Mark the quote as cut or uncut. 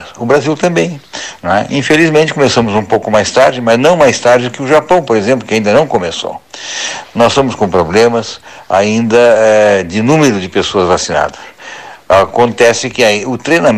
uncut